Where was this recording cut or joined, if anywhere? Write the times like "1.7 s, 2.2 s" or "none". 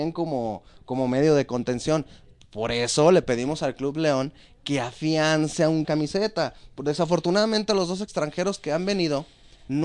5.8 s